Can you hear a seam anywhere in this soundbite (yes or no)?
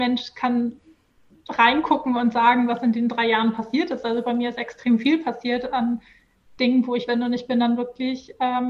yes